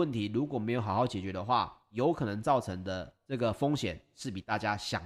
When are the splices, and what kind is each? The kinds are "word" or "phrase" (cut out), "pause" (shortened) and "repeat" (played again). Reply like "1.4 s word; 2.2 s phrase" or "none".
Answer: 1.8 s pause; 3.2 s pause